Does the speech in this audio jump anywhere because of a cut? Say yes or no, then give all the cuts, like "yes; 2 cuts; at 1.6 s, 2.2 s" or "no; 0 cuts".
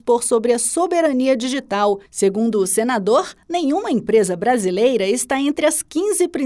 yes; 1 cut; at 2.1 s